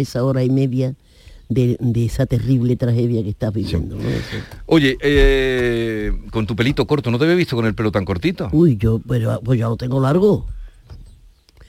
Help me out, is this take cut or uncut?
uncut